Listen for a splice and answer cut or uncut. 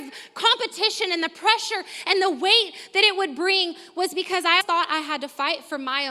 cut